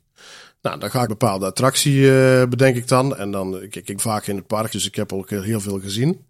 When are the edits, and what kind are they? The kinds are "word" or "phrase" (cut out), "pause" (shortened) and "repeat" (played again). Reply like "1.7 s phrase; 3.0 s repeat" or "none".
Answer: 1.1 s word; 4.0 s word; 4.7 s word